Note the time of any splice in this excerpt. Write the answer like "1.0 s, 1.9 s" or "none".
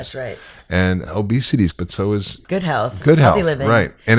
1.7 s, 2.4 s